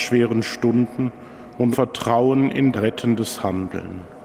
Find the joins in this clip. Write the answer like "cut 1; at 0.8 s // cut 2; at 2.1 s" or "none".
cut 1; at 1.7 s // cut 2; at 2.7 s

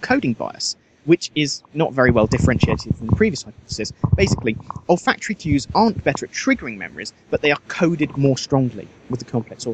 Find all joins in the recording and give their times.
none

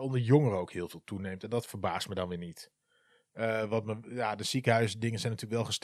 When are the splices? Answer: none

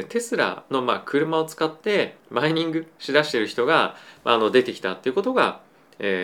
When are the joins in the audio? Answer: cut 1; at 2.2 s

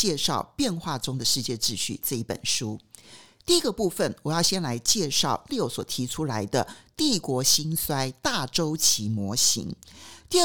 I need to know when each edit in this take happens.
cut 1; at 5.5 s

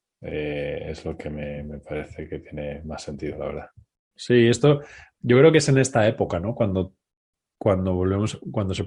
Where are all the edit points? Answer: none

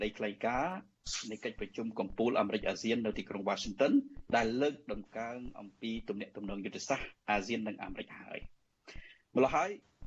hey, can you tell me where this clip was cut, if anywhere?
cut 1; at 4.3 s // cut 2; at 7.2 s

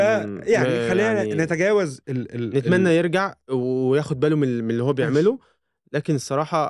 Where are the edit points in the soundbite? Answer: none

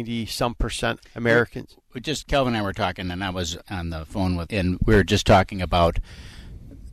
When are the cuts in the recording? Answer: cut 1; at 1.0 s // cut 2; at 2.2 s // cut 3; at 3.6 s // cut 4; at 4.5 s

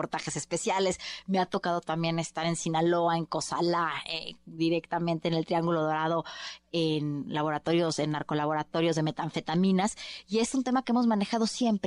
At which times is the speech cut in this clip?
none

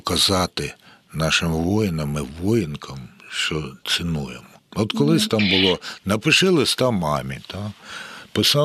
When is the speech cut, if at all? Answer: cut 1; at 4.6 s

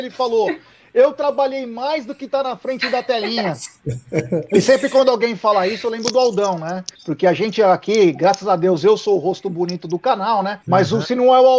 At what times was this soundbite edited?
cut 1; at 7.0 s // cut 2; at 10.6 s

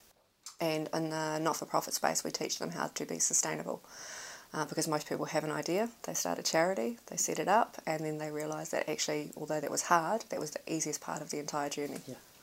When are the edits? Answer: none

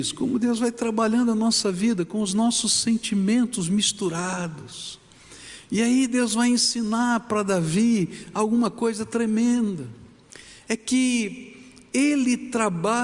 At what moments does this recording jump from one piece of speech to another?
none

